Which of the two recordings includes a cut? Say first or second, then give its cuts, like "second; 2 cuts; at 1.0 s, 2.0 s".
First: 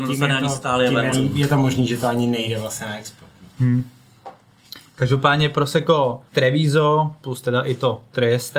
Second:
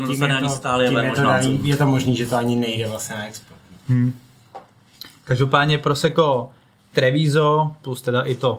first; 2 cuts; at 1.1 s, 6.3 s